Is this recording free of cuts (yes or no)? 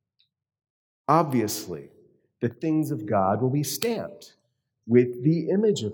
yes